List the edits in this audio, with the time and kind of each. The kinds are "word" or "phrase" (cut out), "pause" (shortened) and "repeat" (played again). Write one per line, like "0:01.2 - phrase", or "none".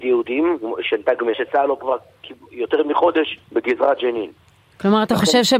0:01.3 - phrase
0:01.8 - word
0:03.4 - pause